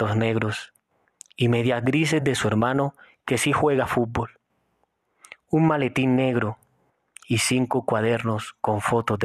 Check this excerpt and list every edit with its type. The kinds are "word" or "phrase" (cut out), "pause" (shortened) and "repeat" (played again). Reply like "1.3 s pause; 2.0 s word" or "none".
none